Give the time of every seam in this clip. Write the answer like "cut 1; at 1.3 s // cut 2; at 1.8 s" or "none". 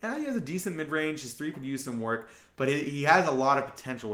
cut 1; at 1.5 s